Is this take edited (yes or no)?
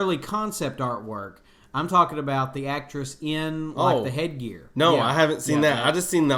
no